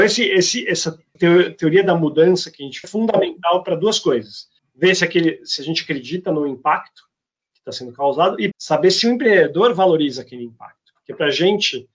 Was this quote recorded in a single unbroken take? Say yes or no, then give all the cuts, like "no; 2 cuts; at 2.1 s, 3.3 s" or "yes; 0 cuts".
no; 4 cuts; at 1.2 s, 2.8 s, 4.6 s, 8.5 s